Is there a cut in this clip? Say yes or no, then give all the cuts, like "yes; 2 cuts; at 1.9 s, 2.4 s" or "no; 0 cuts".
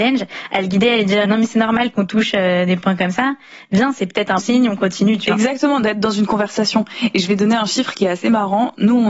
yes; 2 cuts; at 1.2 s, 4.4 s